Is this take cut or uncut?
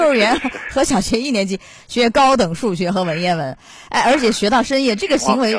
uncut